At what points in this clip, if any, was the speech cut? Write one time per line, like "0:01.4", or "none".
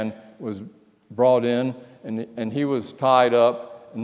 none